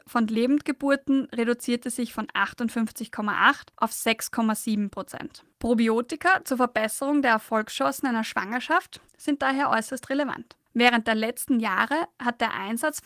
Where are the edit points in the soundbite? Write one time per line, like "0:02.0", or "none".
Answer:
0:03.7
0:05.5
0:09.1
0:10.7